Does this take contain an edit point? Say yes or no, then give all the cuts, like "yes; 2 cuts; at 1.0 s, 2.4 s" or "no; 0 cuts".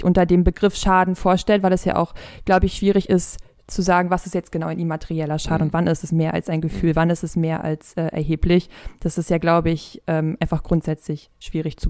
no; 0 cuts